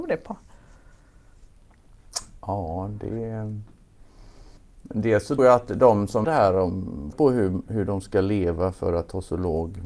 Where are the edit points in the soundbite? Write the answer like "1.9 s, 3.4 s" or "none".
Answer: 4.6 s, 5.4 s, 6.2 s, 7.1 s